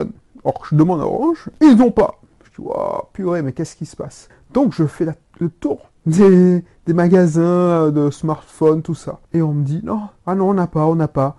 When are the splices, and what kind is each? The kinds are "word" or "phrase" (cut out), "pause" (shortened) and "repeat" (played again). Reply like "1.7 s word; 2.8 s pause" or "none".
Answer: 6.0 s pause; 9.2 s pause; 10.2 s pause